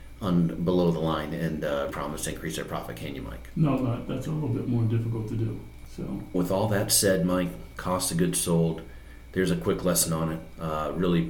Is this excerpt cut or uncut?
cut